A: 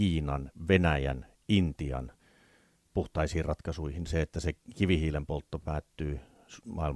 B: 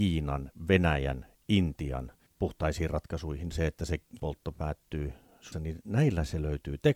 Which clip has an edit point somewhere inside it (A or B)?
B